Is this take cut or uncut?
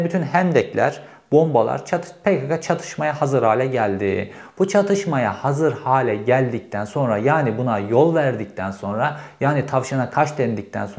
uncut